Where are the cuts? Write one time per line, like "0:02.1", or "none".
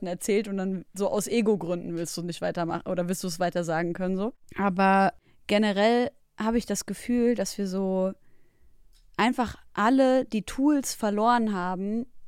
none